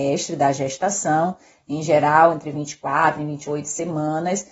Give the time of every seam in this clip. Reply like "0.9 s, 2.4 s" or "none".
none